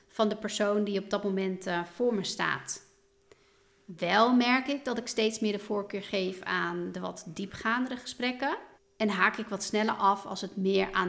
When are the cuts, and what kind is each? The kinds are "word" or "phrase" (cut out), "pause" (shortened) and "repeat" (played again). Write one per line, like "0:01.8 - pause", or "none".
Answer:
0:08.8 - pause